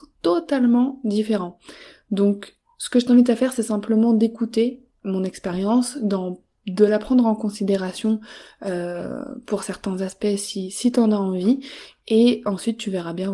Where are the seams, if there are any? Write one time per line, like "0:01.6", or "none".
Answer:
none